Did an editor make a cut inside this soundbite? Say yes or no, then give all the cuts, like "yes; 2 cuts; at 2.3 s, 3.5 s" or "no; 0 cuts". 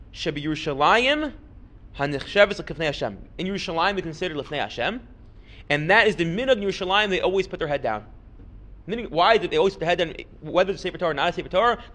no; 0 cuts